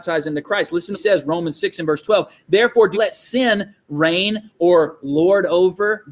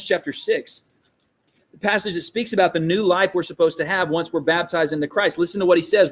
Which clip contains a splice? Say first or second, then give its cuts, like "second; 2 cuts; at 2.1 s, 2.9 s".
first; 2 cuts; at 0.9 s, 2.9 s